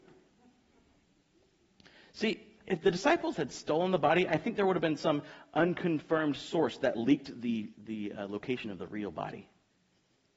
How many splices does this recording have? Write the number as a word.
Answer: one